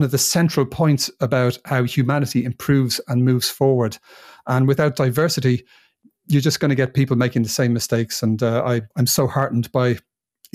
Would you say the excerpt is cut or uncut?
cut